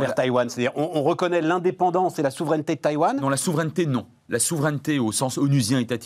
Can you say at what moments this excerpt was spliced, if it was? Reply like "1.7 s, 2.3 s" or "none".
none